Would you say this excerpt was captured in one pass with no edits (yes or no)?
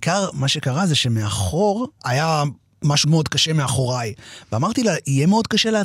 no